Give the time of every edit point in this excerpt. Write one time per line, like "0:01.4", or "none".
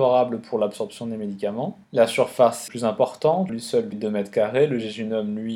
0:01.8
0:02.7
0:03.5
0:03.9